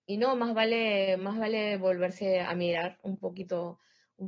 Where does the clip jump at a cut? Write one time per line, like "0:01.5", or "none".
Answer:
none

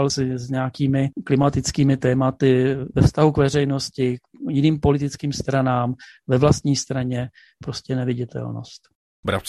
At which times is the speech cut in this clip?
none

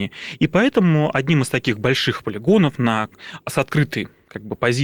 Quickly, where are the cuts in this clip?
none

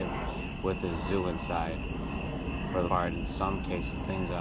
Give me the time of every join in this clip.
0:02.9

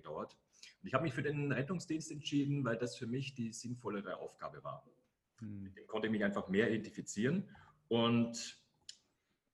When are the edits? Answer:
none

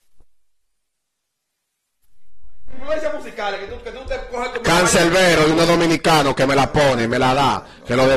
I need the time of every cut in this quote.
none

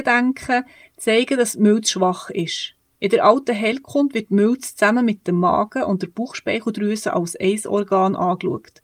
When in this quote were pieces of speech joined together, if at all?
none

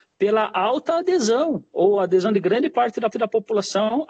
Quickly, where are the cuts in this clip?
0:03.1

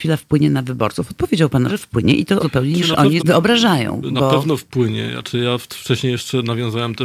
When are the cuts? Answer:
0:01.7
0:02.4
0:03.2

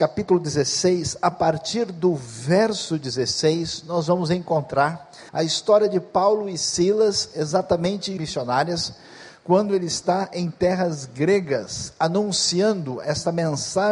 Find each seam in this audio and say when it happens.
0:05.3
0:08.2

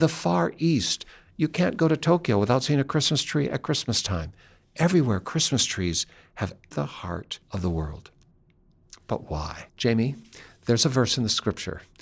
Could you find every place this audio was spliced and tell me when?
0:06.7
0:07.4
0:09.7

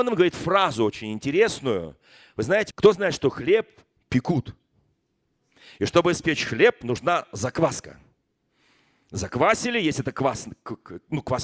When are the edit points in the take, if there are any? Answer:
0:02.7

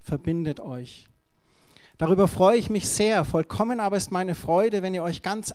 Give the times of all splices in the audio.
none

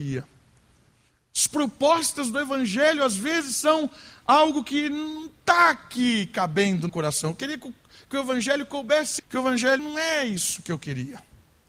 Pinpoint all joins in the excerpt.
0:06.9
0:09.2
0:09.8

